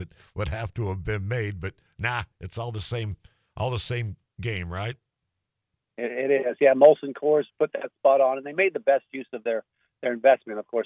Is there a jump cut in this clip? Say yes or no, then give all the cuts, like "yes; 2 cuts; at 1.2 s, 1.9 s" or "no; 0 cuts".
no; 0 cuts